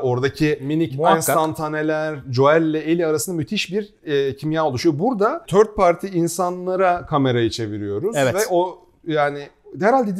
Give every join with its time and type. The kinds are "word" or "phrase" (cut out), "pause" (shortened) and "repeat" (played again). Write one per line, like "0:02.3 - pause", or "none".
none